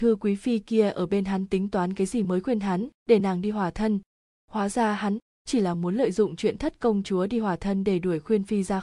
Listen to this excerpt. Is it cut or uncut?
uncut